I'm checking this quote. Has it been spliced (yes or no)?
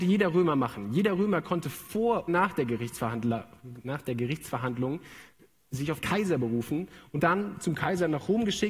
yes